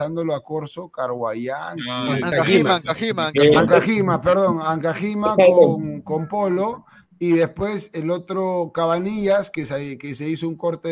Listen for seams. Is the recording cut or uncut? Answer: uncut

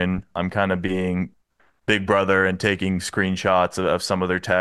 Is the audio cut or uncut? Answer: uncut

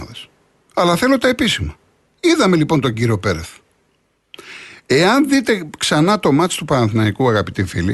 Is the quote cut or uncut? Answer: uncut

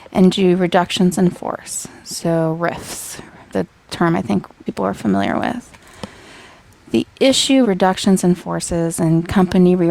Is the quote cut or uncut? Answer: cut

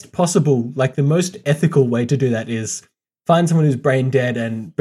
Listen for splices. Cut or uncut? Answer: uncut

